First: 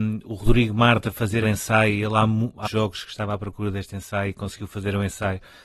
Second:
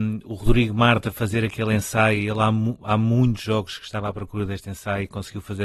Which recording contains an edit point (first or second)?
first